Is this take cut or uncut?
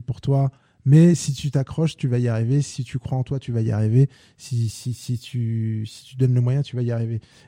uncut